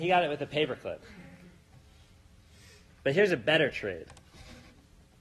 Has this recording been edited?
no; 0 cuts

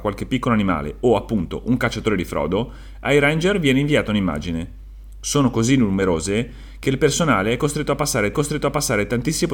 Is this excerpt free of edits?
no; 1 cut; at 8.3 s

